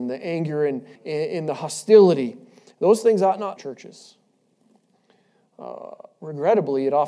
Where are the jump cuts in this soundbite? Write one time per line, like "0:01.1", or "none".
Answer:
0:01.0
0:03.6